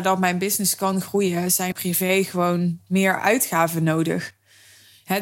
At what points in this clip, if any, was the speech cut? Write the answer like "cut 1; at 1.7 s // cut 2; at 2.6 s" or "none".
cut 1; at 1.7 s